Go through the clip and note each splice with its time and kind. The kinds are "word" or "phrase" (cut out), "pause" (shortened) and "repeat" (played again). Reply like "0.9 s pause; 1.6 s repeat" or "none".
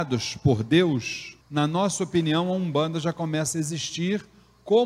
1.4 s pause